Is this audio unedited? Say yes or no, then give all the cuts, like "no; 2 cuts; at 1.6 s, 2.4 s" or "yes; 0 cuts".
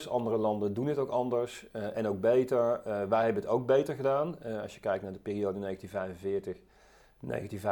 yes; 0 cuts